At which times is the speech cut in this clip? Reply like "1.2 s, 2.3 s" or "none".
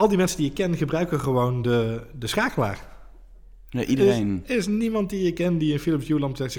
none